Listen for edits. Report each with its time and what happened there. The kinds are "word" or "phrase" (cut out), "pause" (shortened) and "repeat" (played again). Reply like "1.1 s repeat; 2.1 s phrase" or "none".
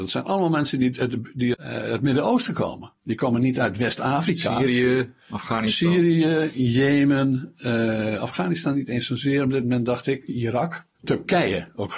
1.5 s word; 10.9 s pause